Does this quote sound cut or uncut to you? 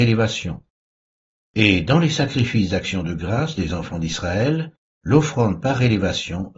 uncut